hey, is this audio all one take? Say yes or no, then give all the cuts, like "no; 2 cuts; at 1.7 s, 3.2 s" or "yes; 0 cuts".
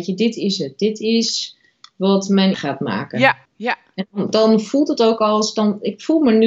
no; 2 cuts; at 2.5 s, 3.4 s